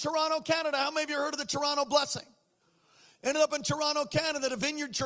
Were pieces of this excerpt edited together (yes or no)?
no